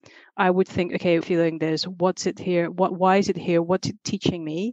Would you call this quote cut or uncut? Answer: cut